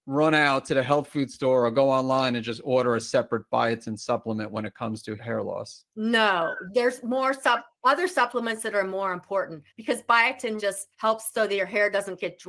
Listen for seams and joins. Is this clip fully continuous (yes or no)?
no